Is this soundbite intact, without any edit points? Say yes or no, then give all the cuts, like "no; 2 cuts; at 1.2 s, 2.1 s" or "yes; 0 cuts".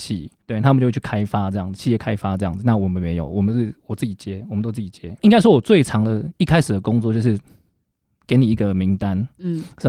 yes; 0 cuts